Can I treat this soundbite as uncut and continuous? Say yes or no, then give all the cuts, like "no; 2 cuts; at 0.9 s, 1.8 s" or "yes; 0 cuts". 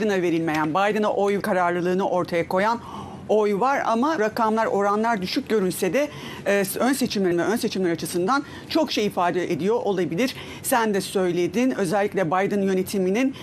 no; 3 cuts; at 1.4 s, 4.2 s, 7.3 s